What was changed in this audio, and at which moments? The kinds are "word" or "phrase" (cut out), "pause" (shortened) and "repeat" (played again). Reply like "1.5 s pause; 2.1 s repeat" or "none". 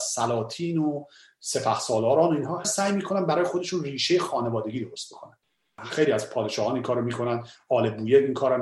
2.6 s word